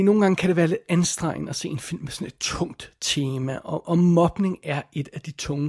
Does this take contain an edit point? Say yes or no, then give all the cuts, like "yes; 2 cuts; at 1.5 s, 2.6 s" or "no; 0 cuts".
no; 0 cuts